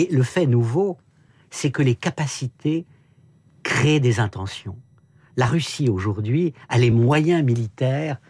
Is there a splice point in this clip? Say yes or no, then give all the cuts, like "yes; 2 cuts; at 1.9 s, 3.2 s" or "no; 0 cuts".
no; 0 cuts